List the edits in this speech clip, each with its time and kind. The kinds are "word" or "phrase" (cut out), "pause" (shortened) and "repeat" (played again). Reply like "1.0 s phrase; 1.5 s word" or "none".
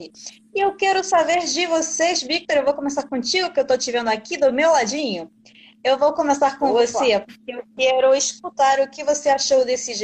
none